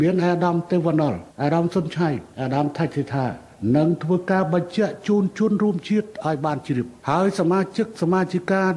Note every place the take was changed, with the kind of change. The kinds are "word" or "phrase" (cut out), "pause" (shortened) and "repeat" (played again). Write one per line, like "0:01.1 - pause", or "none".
0:01.3 - pause
0:02.3 - pause
0:07.0 - pause